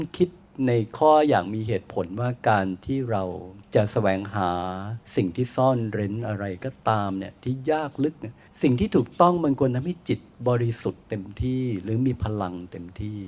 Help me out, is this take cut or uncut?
cut